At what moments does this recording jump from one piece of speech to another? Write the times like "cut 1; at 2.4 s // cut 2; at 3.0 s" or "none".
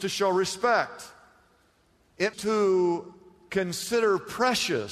cut 1; at 2.3 s